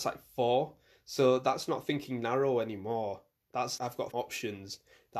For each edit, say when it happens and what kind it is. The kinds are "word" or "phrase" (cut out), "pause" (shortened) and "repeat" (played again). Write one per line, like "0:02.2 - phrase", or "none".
0:03.8 - word
0:04.1 - phrase